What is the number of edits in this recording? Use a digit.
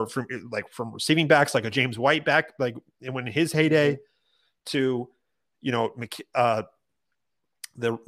0